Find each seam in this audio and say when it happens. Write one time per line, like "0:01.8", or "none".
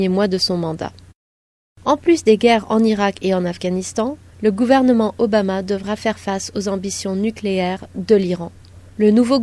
none